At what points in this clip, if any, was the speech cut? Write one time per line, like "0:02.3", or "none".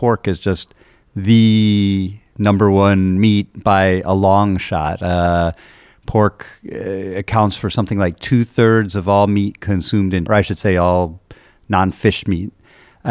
0:10.3